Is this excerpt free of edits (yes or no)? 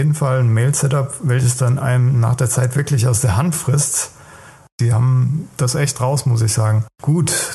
yes